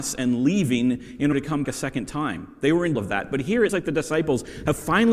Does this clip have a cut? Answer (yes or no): yes